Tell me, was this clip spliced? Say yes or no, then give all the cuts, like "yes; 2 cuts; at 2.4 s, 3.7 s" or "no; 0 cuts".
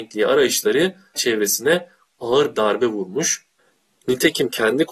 yes; 2 cuts; at 1.2 s, 2.5 s